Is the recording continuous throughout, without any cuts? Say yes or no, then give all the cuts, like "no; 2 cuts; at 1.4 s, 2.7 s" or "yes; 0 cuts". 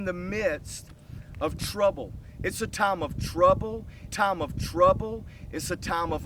no; 1 cut; at 4.1 s